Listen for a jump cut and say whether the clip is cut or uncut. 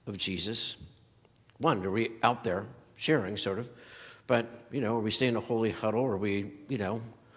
uncut